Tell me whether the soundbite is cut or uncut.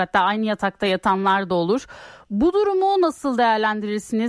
uncut